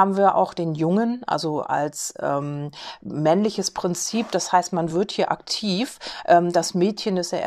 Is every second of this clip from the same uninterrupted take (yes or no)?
yes